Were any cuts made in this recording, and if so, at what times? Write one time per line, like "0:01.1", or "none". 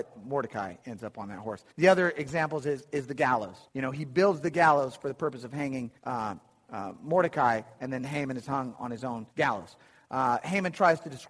0:01.7
0:03.7
0:06.0
0:09.3

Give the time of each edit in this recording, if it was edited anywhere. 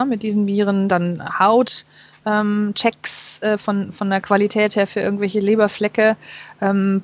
none

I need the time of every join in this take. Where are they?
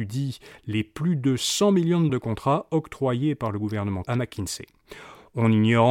0:02.1
0:04.0

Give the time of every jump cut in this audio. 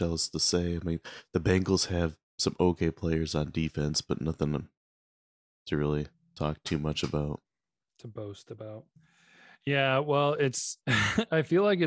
none

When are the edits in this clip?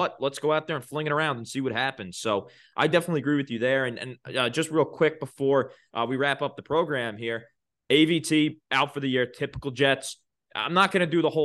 none

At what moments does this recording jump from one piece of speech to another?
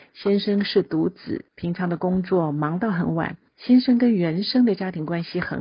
0:01.5
0:03.5

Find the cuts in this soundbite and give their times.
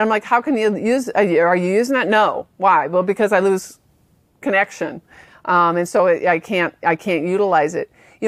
none

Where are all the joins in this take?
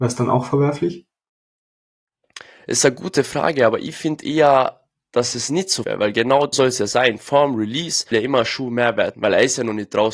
0:05.8
0:06.5
0:08.1
0:09.1

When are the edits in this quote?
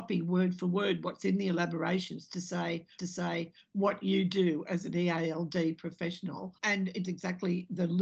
0:03.0
0:06.6
0:07.0

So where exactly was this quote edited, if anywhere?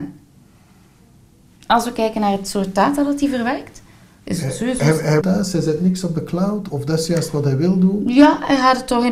0:05.2
0:06.7

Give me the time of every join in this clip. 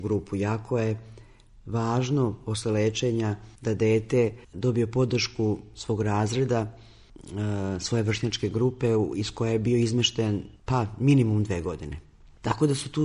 0:03.6
0:04.4
0:10.6

